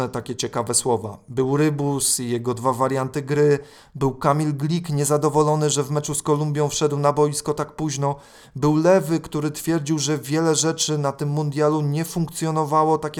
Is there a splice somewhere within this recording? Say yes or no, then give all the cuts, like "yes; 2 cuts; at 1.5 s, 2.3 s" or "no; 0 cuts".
no; 0 cuts